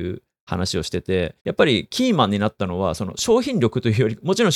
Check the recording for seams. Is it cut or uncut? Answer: cut